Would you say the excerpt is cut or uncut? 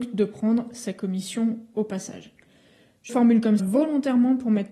cut